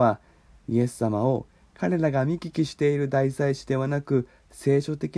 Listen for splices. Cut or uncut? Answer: uncut